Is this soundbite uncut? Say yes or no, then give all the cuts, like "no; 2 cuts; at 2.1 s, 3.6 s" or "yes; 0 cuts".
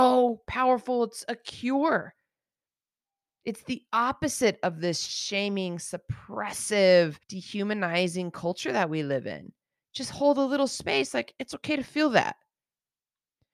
no; 1 cut; at 7.2 s